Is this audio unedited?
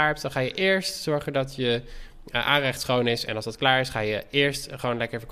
yes; 0 cuts

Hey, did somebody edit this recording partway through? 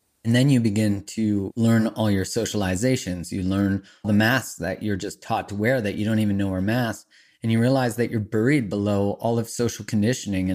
yes; 1 cut; at 4.0 s

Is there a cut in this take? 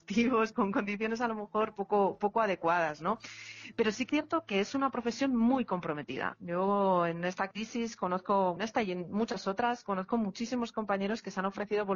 yes; 2 cuts; at 4.1 s, 8.6 s

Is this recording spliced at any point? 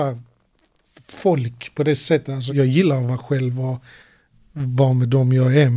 yes; 1 cut; at 2.5 s

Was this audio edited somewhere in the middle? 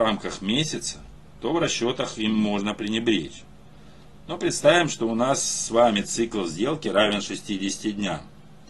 no; 0 cuts

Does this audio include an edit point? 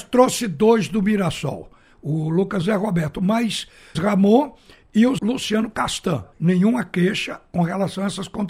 yes; 4 cuts; at 2.6 s, 3.9 s, 5.2 s, 6.3 s

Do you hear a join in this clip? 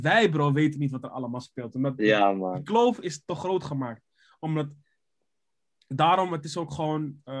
no; 0 cuts

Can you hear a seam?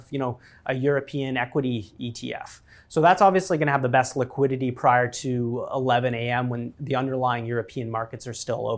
no; 0 cuts

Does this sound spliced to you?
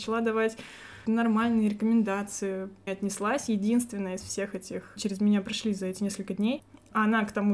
yes; 3 cuts; at 1.1 s, 2.9 s, 5.0 s

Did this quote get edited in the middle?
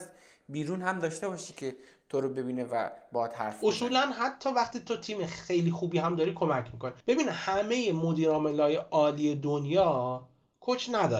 yes; 1 cut; at 7.0 s

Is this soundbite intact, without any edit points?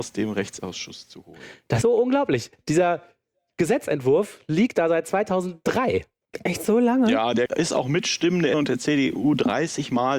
no; 3 cuts; at 1.8 s, 7.5 s, 8.5 s

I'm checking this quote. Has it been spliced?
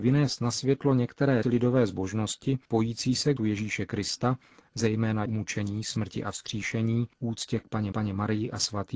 yes; 6 cuts; at 1.4 s, 2.6 s, 3.4 s, 5.3 s, 7.1 s, 7.9 s

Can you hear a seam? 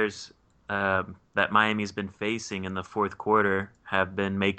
no; 0 cuts

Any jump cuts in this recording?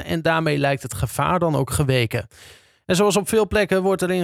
no; 0 cuts

